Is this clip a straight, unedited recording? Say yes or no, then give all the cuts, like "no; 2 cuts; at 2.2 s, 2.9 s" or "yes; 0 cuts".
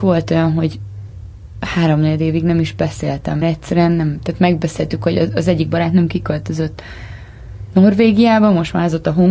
no; 1 cut; at 3.4 s